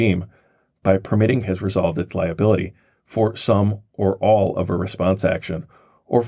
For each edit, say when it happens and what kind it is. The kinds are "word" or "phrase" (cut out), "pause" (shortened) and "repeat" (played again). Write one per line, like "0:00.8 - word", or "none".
0:01.4 - phrase